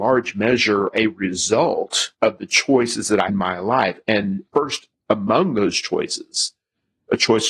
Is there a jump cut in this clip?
yes; 4 cuts; at 0.9 s, 2.1 s, 3.3 s, 4.5 s

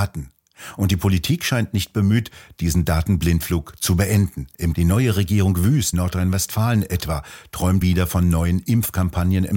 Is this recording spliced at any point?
yes; 3 cuts; at 4.7 s, 5.9 s, 7.8 s

